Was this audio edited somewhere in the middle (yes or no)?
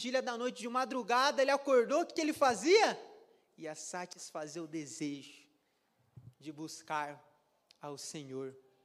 no